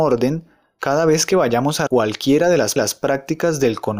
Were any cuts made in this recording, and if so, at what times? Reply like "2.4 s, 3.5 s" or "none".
1.9 s, 2.8 s